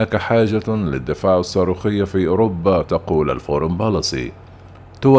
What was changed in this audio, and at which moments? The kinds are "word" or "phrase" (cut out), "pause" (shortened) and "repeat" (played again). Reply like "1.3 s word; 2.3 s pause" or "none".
2.8 s word